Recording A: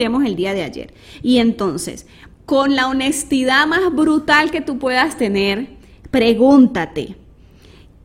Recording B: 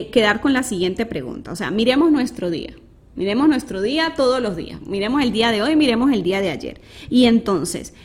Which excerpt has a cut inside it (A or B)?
A